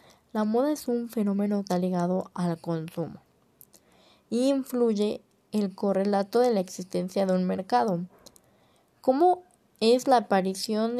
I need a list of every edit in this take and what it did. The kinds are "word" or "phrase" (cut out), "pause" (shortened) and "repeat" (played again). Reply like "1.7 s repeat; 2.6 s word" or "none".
1.7 s word